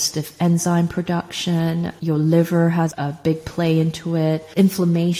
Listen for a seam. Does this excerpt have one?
no; 0 cuts

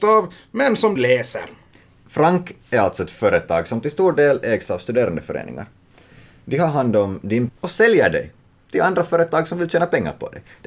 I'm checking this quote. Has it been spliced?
yes; 2 cuts; at 1.0 s, 7.5 s

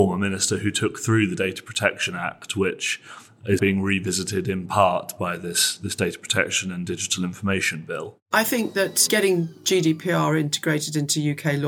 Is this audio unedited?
no; 1 cut; at 3.6 s

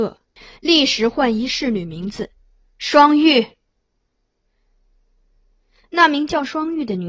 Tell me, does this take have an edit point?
no; 0 cuts

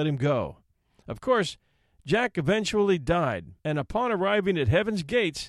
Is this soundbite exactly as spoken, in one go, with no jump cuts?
no; 1 cut; at 3.6 s

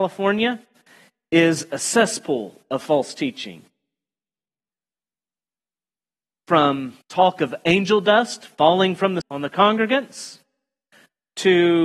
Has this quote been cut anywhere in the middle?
yes; 2 cuts; at 7.0 s, 9.2 s

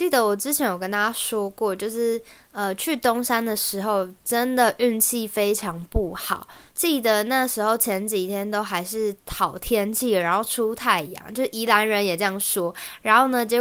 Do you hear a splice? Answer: yes; 1 cut; at 9.2 s

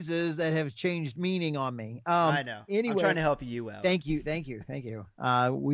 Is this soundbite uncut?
yes; 0 cuts

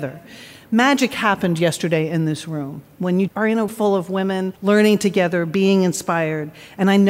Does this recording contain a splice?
yes; 3 cuts; at 3.3 s, 3.7 s, 4.6 s

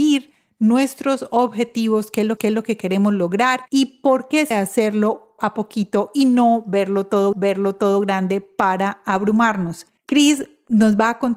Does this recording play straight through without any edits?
no; 6 cuts; at 2.4 s, 3.7 s, 4.5 s, 5.4 s, 7.3 s, 10.0 s

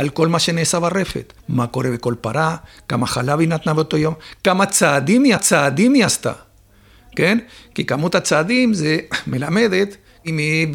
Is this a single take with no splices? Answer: no; 2 cuts; at 1.4 s, 5.4 s

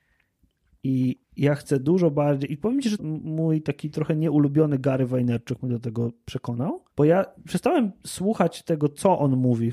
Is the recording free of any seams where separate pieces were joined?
no; 3 cuts; at 1.2 s, 3.0 s, 6.9 s

